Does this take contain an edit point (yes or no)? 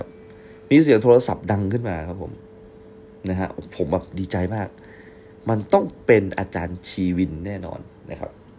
no